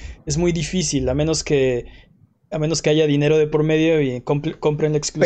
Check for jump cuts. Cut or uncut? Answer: uncut